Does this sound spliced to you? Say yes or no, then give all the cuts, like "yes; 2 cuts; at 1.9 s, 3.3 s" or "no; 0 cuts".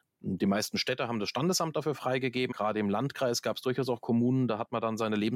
yes; 1 cut; at 2.5 s